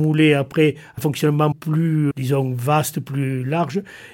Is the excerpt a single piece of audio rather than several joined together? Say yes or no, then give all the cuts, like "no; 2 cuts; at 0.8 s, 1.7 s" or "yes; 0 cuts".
no; 3 cuts; at 1.0 s, 1.5 s, 2.1 s